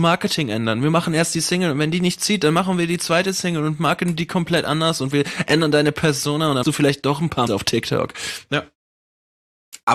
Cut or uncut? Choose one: cut